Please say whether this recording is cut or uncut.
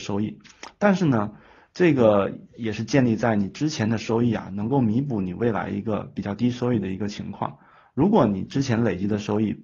uncut